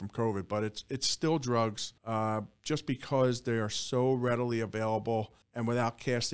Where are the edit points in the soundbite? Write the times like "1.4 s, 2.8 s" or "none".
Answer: 2.0 s, 5.4 s